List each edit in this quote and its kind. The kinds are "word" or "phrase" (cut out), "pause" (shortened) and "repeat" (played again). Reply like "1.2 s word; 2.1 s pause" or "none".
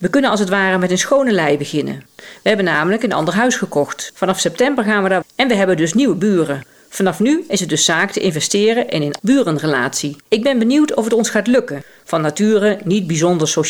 2.1 s pause; 5.2 s word; 9.2 s word; 10.2 s pause